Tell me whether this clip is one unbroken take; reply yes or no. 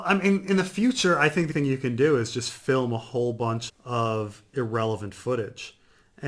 no